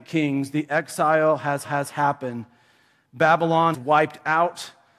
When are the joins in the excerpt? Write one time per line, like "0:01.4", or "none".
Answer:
0:01.6
0:03.7